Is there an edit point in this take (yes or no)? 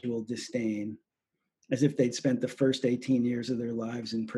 no